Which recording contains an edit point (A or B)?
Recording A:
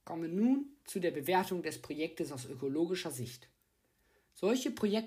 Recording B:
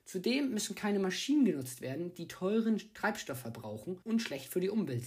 B